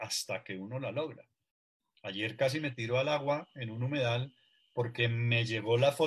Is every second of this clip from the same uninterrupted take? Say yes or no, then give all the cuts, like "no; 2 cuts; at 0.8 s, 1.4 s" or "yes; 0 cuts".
yes; 0 cuts